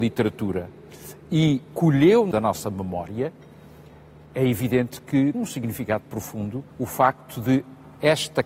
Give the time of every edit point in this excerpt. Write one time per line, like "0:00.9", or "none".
0:01.6
0:02.3
0:05.3
0:06.7